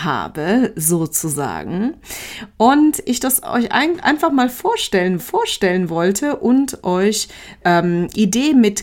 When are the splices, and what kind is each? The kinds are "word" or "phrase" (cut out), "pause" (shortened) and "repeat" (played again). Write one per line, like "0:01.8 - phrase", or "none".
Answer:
0:05.2 - repeat
0:07.6 - word